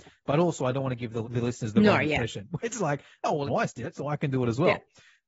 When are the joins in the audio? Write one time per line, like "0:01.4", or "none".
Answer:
0:01.2
0:02.6
0:03.5